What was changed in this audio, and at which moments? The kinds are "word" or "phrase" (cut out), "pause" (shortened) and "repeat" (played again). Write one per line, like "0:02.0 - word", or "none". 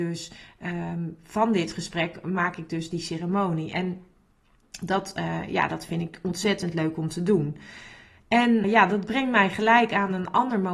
0:08.6 - word